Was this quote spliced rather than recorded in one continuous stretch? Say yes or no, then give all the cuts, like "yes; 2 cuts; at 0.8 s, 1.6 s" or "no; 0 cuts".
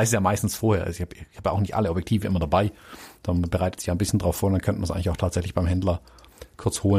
no; 0 cuts